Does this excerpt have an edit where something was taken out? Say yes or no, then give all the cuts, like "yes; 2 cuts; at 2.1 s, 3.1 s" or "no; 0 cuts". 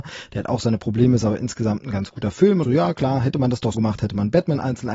yes; 2 cuts; at 2.6 s, 3.7 s